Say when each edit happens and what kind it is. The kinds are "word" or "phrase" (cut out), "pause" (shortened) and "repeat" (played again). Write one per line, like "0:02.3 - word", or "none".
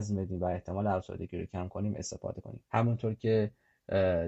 0:02.7 - pause